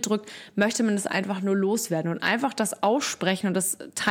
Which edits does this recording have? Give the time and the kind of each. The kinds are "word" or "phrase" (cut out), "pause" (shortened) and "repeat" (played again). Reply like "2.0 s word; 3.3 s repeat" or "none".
none